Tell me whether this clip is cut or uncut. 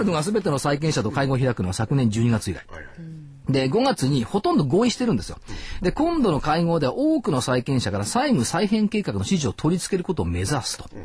cut